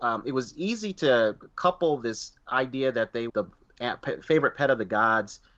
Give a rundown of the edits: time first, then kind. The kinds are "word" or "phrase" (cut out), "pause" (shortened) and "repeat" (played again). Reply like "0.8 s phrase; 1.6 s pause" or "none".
3.3 s word